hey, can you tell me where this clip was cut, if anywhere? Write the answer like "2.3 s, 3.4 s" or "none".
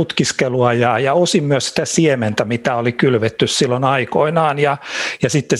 none